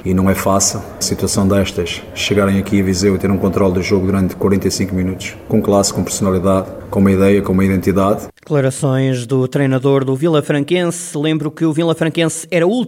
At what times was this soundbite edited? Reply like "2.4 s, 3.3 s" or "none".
1.0 s, 8.4 s